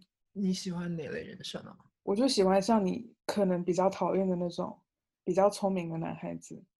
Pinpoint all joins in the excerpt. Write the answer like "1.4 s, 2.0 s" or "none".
none